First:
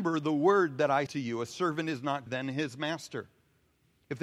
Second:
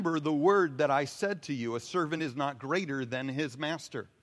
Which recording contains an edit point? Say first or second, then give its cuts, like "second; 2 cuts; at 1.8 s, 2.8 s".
first; 2 cuts; at 1.1 s, 2.3 s